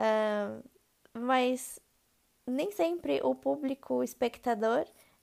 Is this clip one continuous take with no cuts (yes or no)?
yes